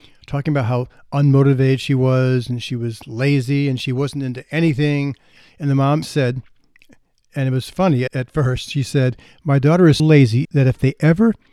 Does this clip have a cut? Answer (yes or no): yes